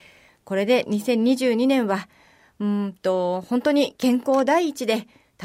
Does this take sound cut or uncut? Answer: uncut